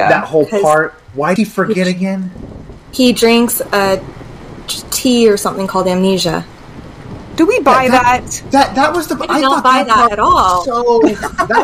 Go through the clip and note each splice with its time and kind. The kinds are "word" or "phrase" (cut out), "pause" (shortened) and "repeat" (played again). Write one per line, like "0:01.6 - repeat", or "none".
0:01.4 - word